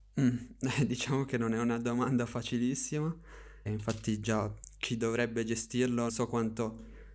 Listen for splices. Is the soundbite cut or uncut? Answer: cut